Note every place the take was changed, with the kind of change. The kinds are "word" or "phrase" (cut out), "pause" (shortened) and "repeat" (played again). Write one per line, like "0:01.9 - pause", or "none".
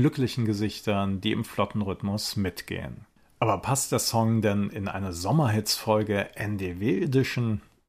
0:03.2 - pause